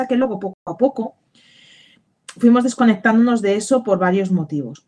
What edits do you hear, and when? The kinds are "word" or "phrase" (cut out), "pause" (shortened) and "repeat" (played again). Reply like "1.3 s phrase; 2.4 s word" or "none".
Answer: none